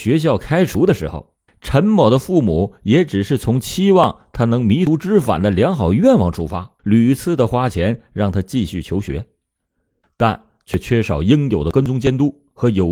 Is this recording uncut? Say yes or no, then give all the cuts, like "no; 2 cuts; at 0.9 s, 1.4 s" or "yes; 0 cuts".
no; 2 cuts; at 1.5 s, 6.8 s